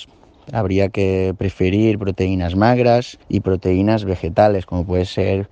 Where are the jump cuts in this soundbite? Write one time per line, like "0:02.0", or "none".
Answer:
0:03.2

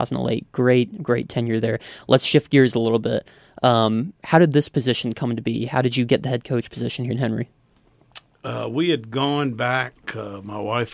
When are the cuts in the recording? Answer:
0:07.1

